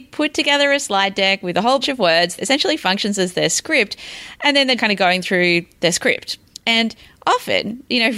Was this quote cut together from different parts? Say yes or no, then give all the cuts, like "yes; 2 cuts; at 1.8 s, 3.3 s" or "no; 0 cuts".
yes; 4 cuts; at 1.8 s, 2.4 s, 4.8 s, 6.5 s